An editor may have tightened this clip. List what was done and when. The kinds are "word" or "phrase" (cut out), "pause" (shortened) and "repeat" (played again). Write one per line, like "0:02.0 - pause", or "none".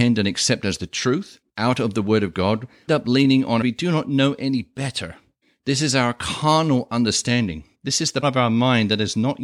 0:01.5 - pause
0:02.9 - phrase
0:03.6 - phrase
0:05.4 - pause
0:07.7 - pause
0:08.2 - word